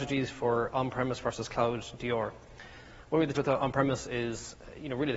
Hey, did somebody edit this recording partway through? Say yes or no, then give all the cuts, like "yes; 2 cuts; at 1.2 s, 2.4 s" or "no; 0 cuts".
yes; 1 cut; at 3.3 s